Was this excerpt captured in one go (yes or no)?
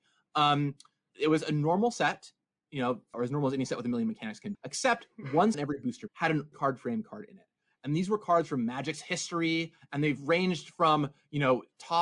no